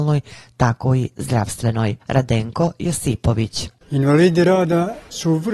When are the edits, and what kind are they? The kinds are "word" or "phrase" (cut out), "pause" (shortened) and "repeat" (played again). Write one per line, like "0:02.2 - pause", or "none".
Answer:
0:02.0 - pause

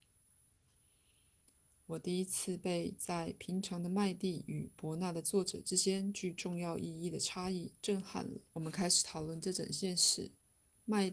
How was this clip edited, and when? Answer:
0:08.5 - pause

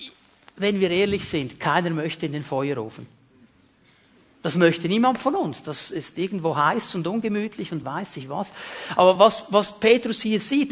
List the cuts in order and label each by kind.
none

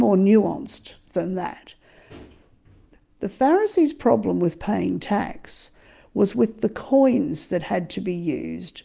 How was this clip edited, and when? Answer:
none

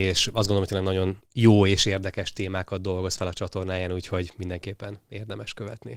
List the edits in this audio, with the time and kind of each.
0:01.3 - pause

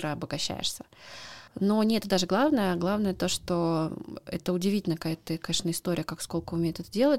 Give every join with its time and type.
0:01.5 - pause

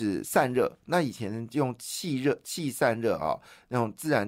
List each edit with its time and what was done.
none

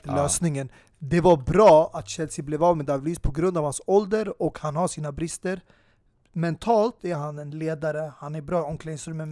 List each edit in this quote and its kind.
0:07.0 - word

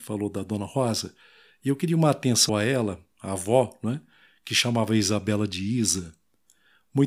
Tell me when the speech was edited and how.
0:02.5 - word

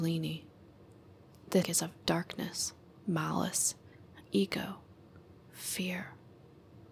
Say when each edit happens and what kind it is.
0:01.6 - word
0:04.2 - word

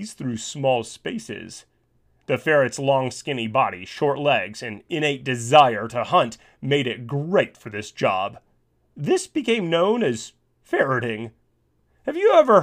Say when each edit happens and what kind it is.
none

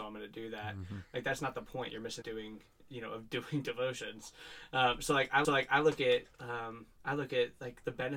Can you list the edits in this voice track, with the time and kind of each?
0:02.2 - phrase
0:05.4 - repeat

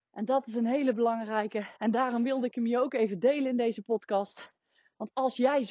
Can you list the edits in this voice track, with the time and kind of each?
0:01.8 - pause

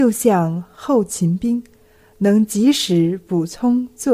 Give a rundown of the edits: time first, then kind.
none

